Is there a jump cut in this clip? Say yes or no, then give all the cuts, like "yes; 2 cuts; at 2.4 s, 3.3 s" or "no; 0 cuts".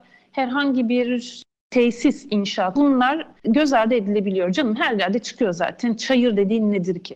yes; 2 cuts; at 2.8 s, 3.4 s